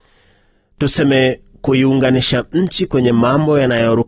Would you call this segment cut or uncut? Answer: uncut